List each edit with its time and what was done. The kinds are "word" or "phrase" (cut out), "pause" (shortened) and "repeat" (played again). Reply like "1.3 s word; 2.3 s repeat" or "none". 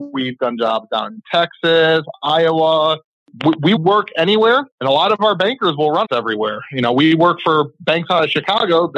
3.8 s word; 4.7 s pause; 6.0 s word